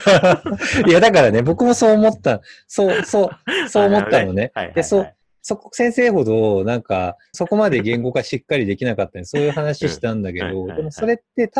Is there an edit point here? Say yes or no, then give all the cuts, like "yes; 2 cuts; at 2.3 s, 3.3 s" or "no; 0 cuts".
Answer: yes; 1 cut; at 7.3 s